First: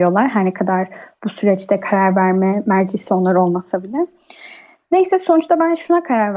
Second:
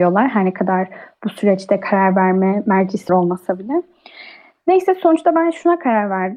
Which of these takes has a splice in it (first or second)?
second